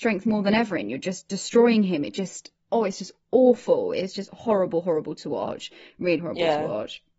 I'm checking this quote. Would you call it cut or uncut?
cut